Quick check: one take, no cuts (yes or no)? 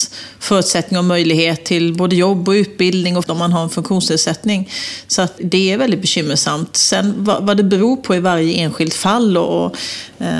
no